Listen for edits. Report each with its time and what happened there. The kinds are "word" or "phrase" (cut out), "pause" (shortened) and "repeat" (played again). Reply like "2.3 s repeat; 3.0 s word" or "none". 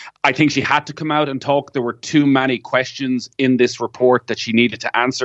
none